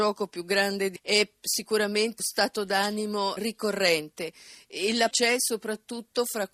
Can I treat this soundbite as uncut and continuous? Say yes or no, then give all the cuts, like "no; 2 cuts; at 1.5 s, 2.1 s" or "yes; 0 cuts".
no; 4 cuts; at 1.0 s, 2.2 s, 3.4 s, 5.1 s